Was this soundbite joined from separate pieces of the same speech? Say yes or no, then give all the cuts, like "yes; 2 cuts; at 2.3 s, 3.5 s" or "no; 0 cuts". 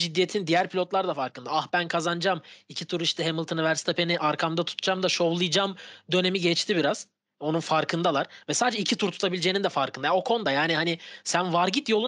no; 0 cuts